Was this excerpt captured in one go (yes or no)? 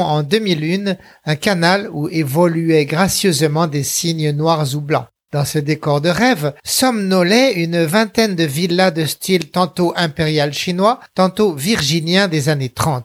no